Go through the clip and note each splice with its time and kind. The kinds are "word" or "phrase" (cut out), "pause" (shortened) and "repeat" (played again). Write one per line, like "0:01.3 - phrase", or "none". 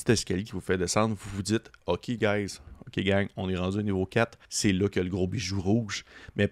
0:04.4 - pause